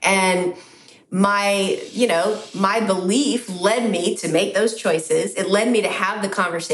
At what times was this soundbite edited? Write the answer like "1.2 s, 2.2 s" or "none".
none

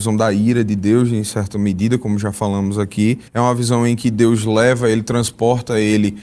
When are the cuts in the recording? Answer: 3.3 s

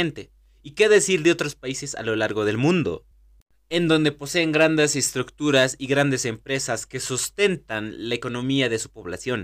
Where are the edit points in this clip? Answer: none

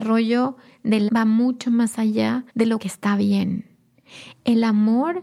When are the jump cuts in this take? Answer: 1.1 s, 2.5 s, 2.8 s

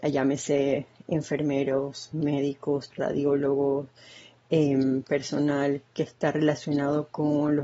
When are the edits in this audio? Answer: 2.9 s

